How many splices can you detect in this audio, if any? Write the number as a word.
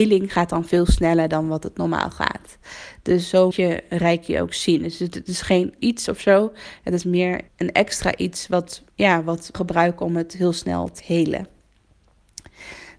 six